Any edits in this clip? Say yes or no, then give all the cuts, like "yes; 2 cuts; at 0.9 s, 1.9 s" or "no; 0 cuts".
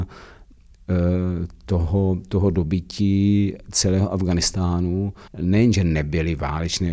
yes; 1 cut; at 5.3 s